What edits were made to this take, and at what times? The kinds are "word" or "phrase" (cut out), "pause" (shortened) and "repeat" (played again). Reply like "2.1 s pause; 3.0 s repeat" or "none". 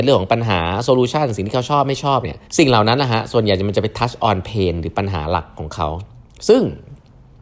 2.5 s pause

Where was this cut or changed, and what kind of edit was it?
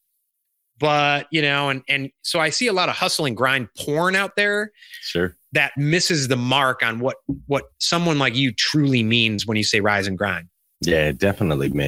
7.7 s pause

